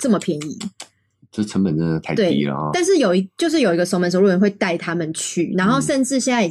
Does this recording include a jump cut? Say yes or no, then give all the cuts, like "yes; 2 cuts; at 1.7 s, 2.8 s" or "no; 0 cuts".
no; 0 cuts